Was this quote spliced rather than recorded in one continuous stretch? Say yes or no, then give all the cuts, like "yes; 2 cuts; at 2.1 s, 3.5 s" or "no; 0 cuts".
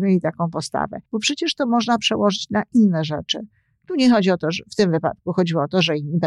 yes; 1 cut; at 1.1 s